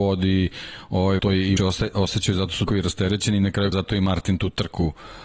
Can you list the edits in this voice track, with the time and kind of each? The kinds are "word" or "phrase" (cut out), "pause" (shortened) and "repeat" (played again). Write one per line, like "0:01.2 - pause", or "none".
0:01.2 - word
0:01.6 - word
0:02.7 - word
0:03.7 - word